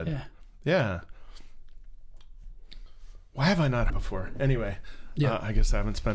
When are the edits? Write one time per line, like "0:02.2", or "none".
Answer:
0:03.9